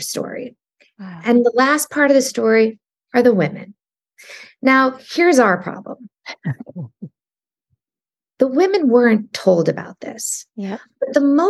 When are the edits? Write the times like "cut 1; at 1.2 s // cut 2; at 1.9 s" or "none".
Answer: none